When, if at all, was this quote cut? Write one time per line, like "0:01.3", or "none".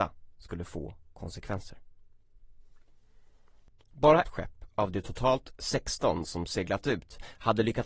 0:04.2